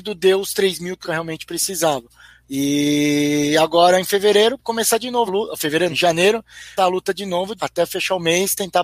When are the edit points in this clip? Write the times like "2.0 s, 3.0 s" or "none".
1.0 s, 4.6 s, 5.3 s, 5.9 s, 6.8 s, 7.6 s